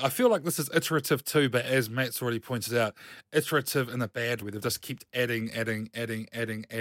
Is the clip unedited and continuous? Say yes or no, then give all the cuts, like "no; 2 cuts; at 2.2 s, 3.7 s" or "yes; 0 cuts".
no; 1 cut; at 4.4 s